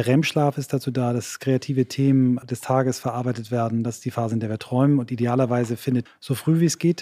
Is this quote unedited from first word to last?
no; 2 cuts; at 2.4 s, 6.1 s

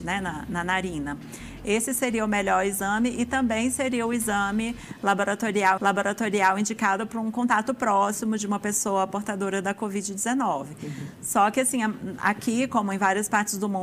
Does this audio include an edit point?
yes; 1 cut; at 5.8 s

